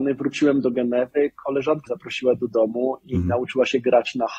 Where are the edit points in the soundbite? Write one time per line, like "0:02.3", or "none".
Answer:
0:01.9
0:02.4